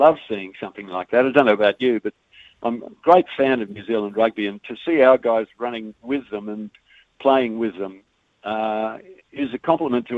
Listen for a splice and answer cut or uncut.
uncut